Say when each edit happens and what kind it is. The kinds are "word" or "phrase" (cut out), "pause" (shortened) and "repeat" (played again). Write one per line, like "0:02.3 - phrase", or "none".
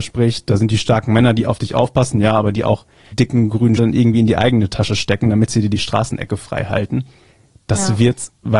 0:03.1 - word
0:03.8 - word